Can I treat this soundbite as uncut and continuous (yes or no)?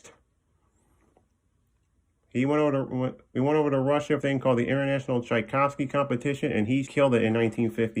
no